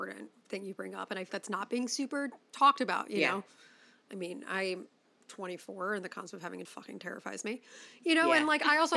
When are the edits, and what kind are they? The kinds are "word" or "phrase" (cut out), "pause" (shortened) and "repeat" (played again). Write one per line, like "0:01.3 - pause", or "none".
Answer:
0:01.3 - word
0:06.7 - word